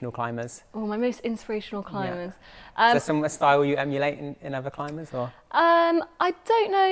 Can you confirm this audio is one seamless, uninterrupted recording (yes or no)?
yes